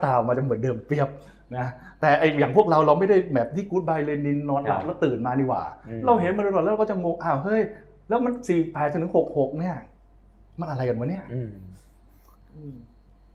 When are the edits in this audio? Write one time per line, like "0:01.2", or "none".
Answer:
none